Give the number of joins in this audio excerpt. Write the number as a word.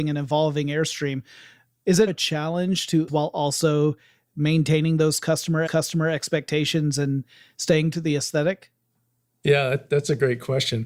four